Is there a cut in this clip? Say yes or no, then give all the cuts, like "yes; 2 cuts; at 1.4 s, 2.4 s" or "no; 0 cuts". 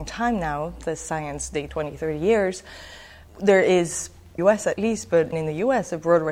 yes; 4 cuts; at 1.7 s, 3.3 s, 4.4 s, 5.3 s